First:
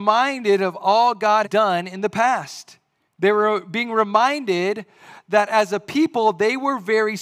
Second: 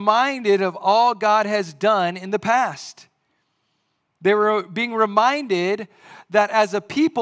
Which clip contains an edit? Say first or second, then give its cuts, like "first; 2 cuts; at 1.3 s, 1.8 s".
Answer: first; 2 cuts; at 1.4 s, 3.1 s